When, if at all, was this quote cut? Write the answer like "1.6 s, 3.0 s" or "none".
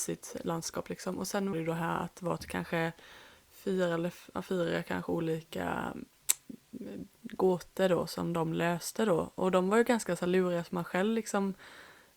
1.5 s

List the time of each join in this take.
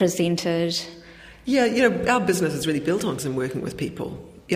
3.2 s

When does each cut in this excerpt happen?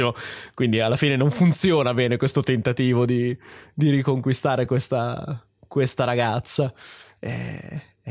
none

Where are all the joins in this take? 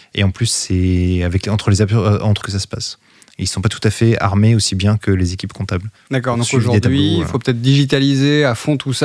2.4 s, 6.0 s

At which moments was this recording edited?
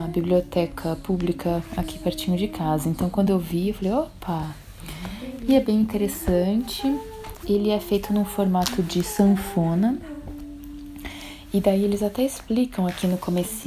none

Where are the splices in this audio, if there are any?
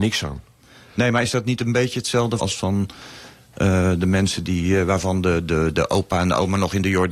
2.4 s

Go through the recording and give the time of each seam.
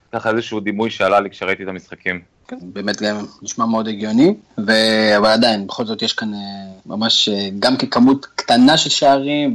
2.6 s, 6.8 s

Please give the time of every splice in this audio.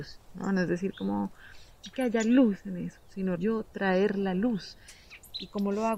1.9 s, 3.4 s

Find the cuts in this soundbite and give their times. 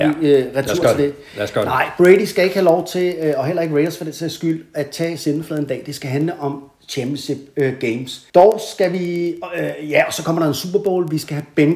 8.3 s

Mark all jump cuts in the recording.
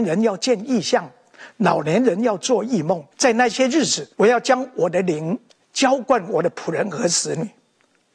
3.1 s, 4.1 s, 5.5 s

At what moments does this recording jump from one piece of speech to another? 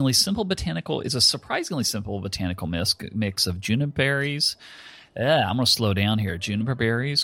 none

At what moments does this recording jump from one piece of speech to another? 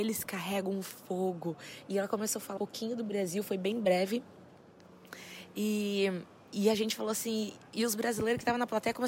2.6 s

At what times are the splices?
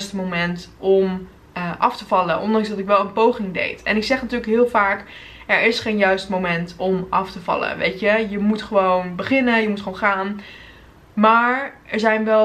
none

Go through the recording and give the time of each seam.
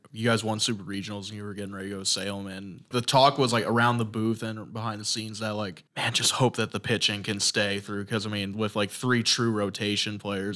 2.9 s, 5.9 s

